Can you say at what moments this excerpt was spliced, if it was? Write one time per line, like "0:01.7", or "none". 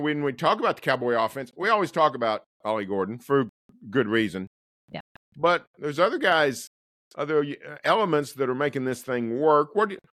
none

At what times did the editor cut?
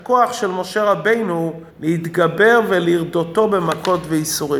0:01.7

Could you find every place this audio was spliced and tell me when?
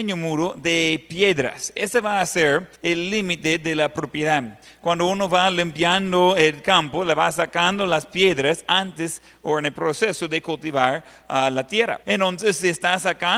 0:02.8
0:12.0

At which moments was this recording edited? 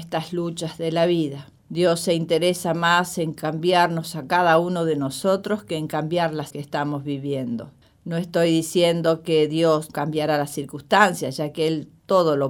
0:01.6
0:06.5
0:07.8
0:09.9

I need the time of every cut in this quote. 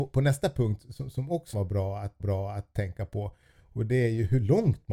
0:01.5
0:02.2

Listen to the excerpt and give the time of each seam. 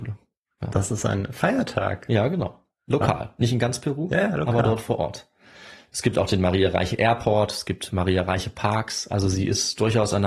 none

